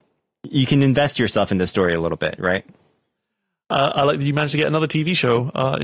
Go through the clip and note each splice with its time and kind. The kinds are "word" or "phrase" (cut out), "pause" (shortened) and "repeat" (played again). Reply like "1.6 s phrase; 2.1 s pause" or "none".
none